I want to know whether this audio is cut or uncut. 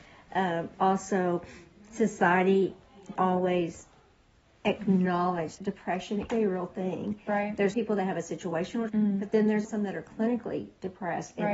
cut